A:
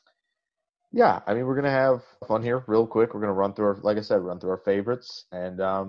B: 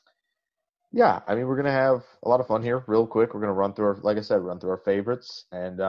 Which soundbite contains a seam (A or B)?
A